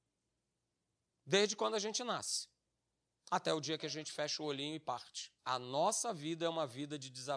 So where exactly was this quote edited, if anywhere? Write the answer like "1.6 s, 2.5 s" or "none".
5.4 s